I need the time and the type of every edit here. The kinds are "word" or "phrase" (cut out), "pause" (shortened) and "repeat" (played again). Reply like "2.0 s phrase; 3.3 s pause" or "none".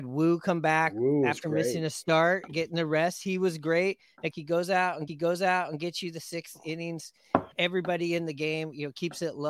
4.3 s phrase; 5.1 s repeat; 7.5 s word